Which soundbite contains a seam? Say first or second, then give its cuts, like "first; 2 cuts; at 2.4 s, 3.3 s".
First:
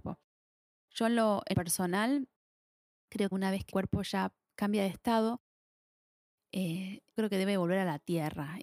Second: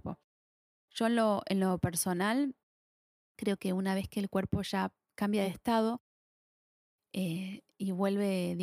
first; 4 cuts; at 1.5 s, 3.3 s, 3.7 s, 7.2 s